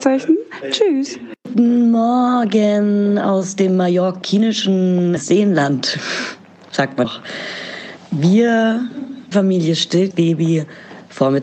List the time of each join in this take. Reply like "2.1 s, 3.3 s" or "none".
1.4 s, 5.2 s, 7.0 s, 9.3 s, 10.1 s